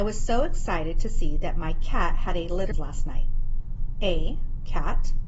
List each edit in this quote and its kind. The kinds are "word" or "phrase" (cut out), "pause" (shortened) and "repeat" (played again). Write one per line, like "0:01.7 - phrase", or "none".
0:02.7 - phrase

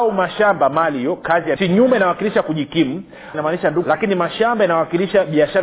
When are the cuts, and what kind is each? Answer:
0:01.6 - phrase
0:03.3 - phrase
0:03.8 - word

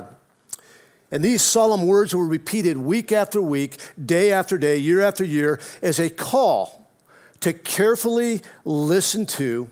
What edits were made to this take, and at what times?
none

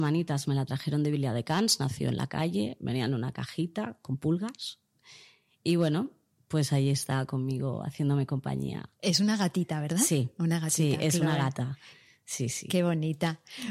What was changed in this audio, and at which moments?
none

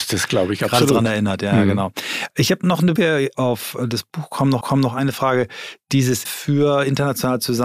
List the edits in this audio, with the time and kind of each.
0:02.6 - word
0:03.0 - word
0:03.3 - word
0:04.6 - repeat
0:06.2 - word

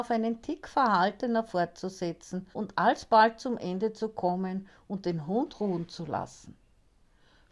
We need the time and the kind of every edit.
0:02.5 - pause

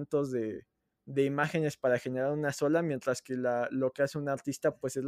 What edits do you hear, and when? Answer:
0:00.9 - pause

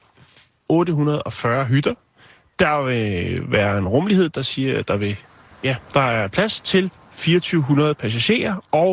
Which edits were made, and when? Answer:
none

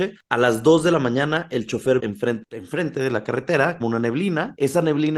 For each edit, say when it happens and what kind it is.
0:02.0 - word
0:02.4 - word
0:03.8 - phrase

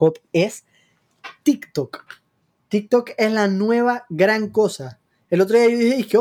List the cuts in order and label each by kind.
none

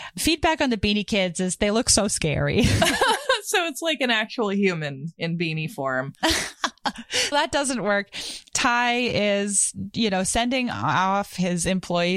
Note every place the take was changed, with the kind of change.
0:07.3 - word

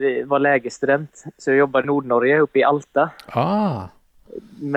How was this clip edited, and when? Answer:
0:01.8 - phrase

